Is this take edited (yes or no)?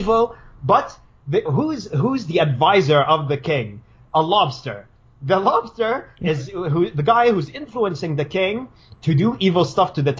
yes